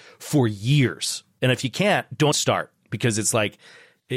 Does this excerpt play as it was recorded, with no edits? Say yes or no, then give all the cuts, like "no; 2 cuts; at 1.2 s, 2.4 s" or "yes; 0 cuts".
no; 1 cut; at 2.3 s